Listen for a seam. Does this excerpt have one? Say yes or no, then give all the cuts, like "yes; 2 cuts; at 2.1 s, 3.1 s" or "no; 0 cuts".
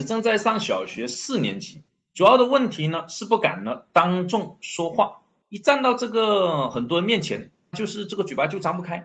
yes; 3 cuts; at 1.9 s, 5.4 s, 7.7 s